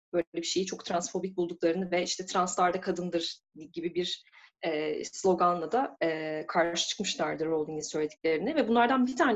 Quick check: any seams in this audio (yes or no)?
no